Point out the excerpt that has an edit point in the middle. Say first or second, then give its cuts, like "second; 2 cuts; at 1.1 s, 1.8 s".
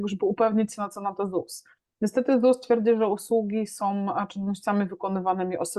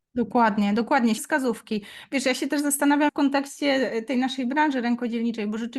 second; 2 cuts; at 1.2 s, 3.1 s